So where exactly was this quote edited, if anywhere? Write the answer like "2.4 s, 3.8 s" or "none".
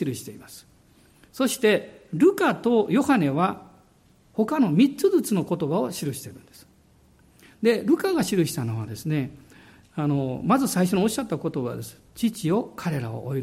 12.1 s